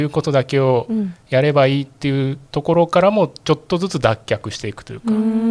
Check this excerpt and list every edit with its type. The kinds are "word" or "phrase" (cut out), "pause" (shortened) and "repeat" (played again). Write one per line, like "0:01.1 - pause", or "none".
0:02.5 - pause